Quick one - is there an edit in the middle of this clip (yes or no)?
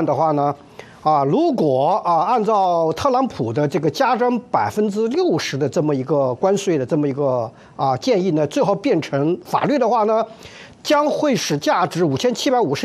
no